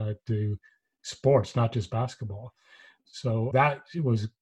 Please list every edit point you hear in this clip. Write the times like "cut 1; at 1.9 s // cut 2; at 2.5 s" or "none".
cut 1; at 3.5 s